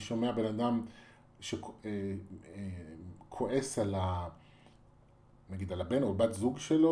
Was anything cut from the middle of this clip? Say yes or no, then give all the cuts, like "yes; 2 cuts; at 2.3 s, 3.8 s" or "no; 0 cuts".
no; 0 cuts